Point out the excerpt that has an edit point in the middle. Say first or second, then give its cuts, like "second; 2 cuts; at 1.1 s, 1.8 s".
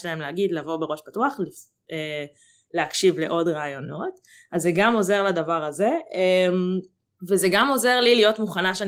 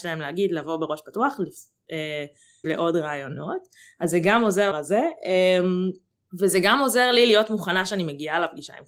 second; 2 cuts; at 2.6 s, 4.7 s